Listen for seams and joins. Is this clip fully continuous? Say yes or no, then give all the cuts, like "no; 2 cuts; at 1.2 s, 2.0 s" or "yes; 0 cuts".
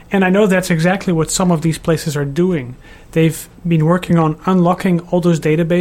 yes; 0 cuts